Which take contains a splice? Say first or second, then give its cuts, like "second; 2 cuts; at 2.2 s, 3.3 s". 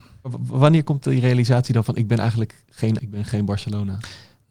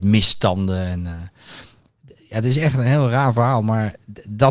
first; 1 cut; at 3.0 s